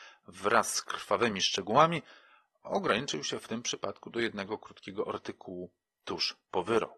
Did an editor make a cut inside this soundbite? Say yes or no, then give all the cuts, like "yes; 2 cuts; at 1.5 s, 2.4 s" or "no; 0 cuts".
no; 0 cuts